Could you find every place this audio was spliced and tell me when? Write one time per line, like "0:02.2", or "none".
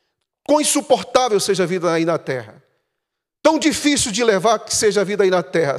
none